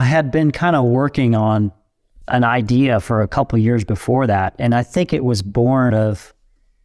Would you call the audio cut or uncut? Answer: cut